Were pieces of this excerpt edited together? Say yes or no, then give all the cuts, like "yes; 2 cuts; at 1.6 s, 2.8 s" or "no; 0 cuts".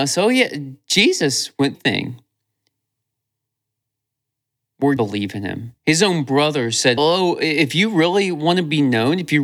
yes; 4 cuts; at 1.7 s, 5.0 s, 5.8 s, 7.0 s